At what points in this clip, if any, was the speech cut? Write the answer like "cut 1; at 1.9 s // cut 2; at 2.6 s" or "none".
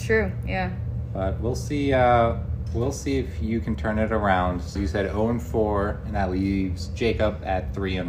cut 1; at 4.8 s